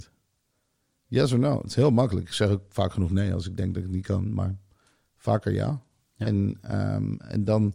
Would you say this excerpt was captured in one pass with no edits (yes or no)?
yes